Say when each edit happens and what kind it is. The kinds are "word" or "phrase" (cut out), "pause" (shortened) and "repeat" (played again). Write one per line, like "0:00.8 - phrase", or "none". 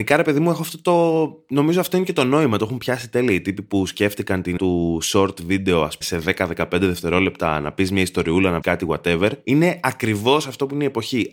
0:04.6 - word
0:06.0 - word
0:08.6 - word